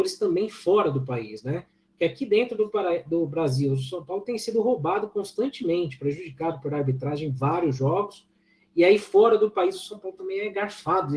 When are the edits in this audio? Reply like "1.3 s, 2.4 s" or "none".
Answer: none